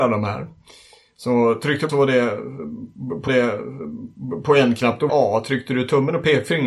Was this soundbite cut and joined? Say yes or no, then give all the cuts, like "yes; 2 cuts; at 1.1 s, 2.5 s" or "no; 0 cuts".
yes; 3 cuts; at 1.9 s, 3.3 s, 5.1 s